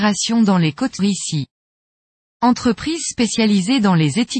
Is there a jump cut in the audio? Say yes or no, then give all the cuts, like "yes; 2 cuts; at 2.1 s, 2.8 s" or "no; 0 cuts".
yes; 1 cut; at 1.0 s